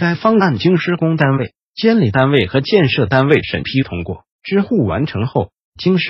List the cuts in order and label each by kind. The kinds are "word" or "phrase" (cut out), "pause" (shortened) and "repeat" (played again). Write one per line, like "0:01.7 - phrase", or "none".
0:04.3 - pause